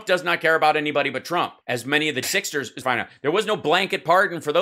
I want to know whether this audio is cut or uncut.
cut